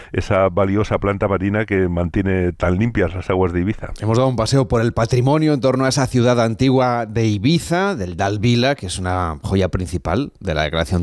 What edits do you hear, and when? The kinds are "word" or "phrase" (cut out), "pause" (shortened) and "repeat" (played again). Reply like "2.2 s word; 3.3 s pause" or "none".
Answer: none